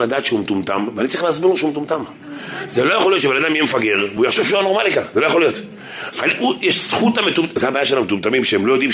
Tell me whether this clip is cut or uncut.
uncut